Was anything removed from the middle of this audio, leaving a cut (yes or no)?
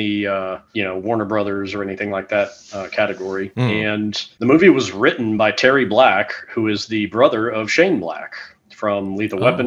no